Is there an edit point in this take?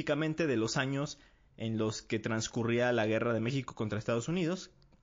no; 0 cuts

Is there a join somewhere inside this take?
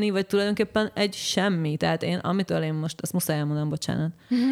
no; 0 cuts

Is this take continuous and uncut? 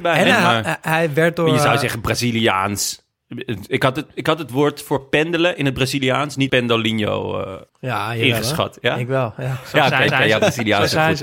no; 3 cuts; at 6.5 s, 7.7 s, 10.1 s

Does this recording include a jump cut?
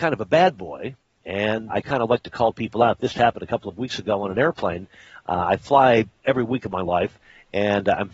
yes; 2 cuts; at 1.7 s, 3.1 s

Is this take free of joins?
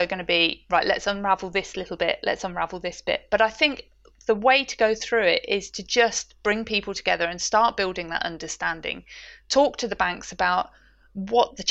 yes; 0 cuts

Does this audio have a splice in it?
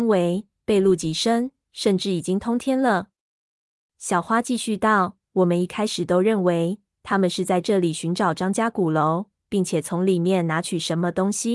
no; 0 cuts

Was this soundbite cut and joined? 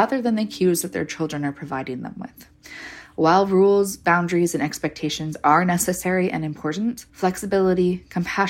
yes; 1 cut; at 7.1 s

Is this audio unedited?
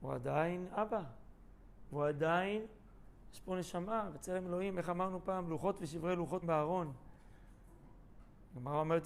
no; 1 cut; at 6.4 s

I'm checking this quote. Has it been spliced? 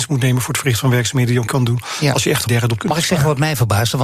yes; 3 cuts; at 1.5 s, 2.5 s, 2.8 s

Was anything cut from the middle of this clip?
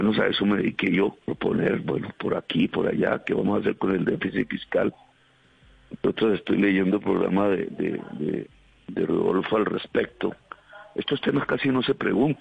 yes; 1 cut; at 1.2 s

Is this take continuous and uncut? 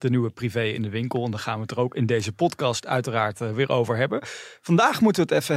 yes; 0 cuts

